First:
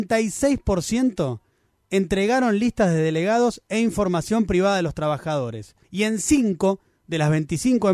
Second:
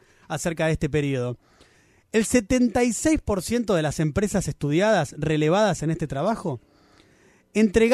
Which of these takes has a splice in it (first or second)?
first